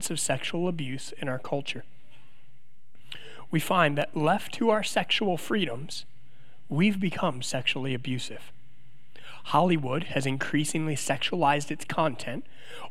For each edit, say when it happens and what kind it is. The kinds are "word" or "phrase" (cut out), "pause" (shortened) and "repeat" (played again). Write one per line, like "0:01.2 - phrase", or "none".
none